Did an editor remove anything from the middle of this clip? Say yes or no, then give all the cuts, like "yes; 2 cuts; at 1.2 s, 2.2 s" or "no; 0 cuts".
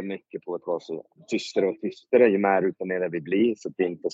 no; 0 cuts